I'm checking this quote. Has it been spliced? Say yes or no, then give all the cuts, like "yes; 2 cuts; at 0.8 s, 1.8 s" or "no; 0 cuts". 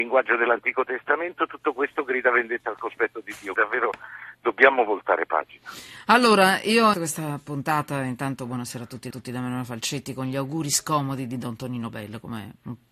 yes; 3 cuts; at 3.6 s, 6.9 s, 9.1 s